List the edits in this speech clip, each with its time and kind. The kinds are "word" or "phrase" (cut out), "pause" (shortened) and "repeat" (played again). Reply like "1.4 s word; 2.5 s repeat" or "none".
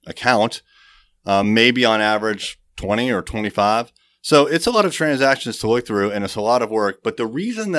none